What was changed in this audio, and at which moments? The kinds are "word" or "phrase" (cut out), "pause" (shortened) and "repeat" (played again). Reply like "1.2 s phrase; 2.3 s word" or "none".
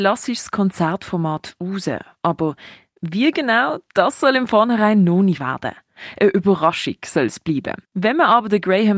5.4 s word; 7.8 s pause